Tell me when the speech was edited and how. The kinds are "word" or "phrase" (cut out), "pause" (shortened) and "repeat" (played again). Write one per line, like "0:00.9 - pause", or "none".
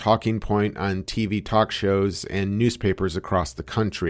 none